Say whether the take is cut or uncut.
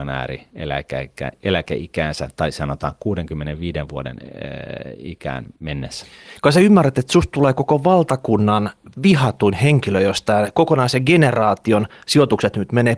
cut